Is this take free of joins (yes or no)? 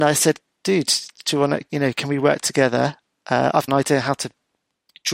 no